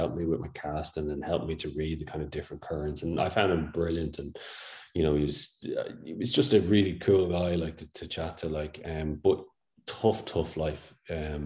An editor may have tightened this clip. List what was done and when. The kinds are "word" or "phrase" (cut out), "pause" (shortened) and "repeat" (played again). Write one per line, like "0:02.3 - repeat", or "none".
none